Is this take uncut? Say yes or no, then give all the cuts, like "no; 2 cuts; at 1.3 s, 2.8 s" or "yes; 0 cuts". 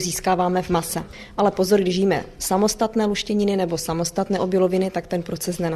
yes; 0 cuts